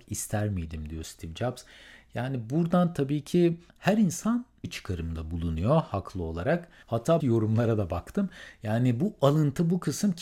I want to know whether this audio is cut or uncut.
cut